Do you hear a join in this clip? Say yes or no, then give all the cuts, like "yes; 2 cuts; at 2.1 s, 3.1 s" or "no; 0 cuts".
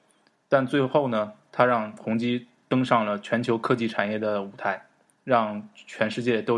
no; 0 cuts